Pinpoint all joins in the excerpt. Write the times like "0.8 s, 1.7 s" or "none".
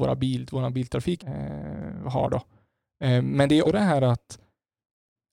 1.2 s, 3.6 s